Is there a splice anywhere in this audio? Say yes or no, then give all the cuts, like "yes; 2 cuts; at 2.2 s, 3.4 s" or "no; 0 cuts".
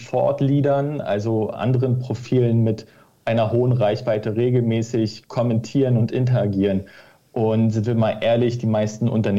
no; 0 cuts